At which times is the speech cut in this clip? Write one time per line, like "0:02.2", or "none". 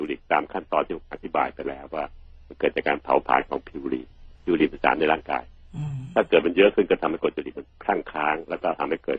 0:04.3